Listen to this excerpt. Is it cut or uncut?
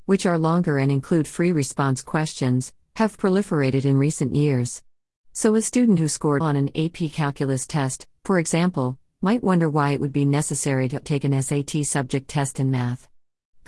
cut